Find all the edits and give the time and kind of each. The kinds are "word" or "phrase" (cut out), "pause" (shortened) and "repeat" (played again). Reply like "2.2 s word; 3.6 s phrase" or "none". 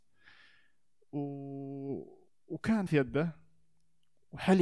2.9 s word